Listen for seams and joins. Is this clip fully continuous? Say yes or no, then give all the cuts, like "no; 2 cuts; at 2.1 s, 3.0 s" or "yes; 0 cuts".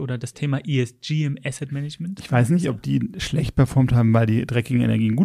yes; 0 cuts